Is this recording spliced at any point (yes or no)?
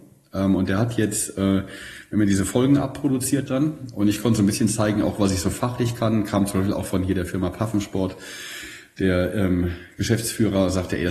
no